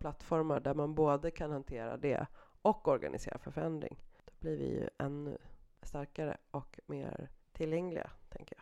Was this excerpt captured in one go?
no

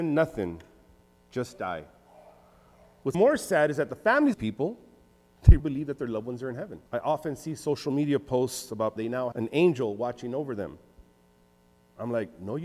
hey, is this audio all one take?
no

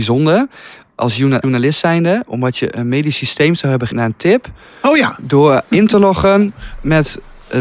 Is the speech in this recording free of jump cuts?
no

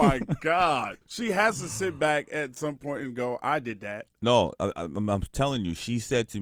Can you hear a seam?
yes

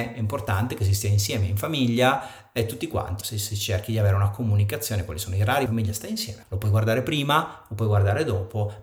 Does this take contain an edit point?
yes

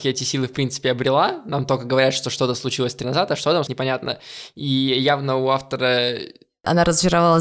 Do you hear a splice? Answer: yes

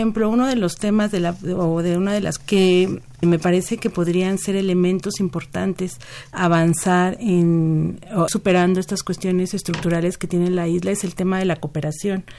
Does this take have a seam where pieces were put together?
yes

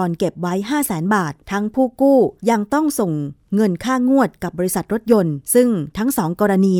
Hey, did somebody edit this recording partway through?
yes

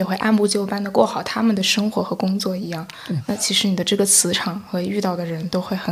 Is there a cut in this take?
no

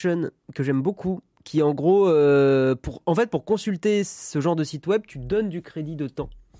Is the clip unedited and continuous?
yes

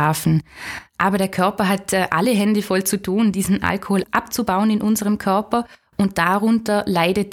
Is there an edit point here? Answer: no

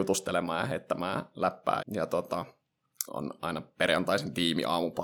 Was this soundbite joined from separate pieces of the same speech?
yes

